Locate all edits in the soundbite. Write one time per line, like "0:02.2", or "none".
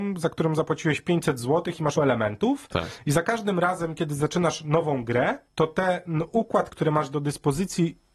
0:02.0
0:05.5
0:06.7